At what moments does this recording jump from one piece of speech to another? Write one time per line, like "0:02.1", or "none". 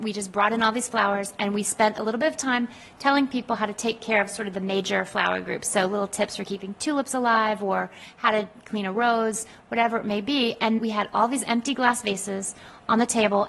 0:10.8